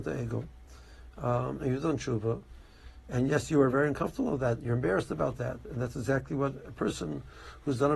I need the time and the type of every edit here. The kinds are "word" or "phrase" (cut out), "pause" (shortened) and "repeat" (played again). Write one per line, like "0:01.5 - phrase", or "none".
none